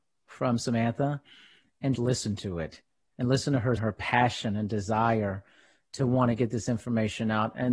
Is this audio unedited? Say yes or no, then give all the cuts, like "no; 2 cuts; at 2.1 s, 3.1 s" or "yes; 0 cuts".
no; 2 cuts; at 1.9 s, 3.8 s